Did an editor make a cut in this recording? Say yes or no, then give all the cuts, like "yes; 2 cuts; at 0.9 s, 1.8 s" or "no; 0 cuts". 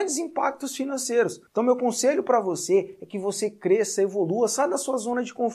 yes; 1 cut; at 1.5 s